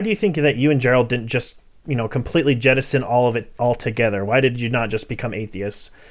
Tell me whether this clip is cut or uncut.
uncut